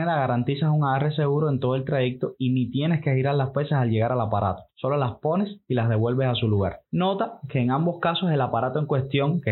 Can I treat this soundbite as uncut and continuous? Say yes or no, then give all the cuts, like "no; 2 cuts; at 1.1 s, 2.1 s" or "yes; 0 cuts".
no; 1 cut; at 4.7 s